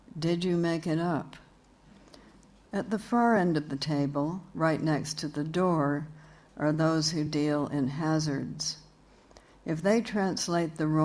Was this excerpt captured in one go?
yes; 0 cuts

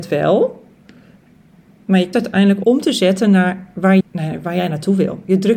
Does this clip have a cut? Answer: yes; 3 cuts; at 2.1 s, 2.6 s, 4.0 s

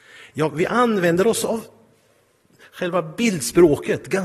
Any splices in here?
no; 0 cuts

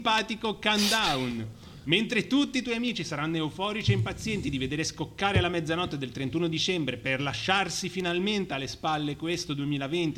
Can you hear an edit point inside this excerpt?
no; 0 cuts

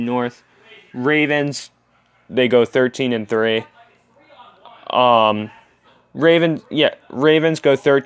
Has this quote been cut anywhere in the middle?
yes; 1 cut; at 5.9 s

